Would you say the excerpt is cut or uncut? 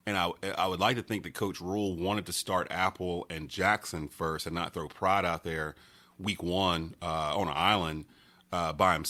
uncut